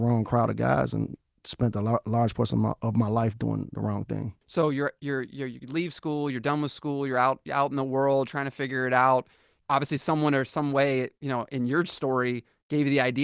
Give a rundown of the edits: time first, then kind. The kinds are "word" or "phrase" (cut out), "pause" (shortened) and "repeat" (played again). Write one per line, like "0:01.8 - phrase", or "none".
0:04.4 - pause